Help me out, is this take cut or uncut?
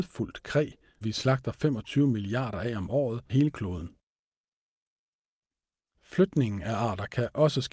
cut